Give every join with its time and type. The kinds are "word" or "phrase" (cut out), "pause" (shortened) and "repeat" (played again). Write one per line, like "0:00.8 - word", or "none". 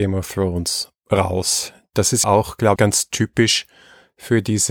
0:01.0 - pause
0:02.2 - word
0:02.8 - word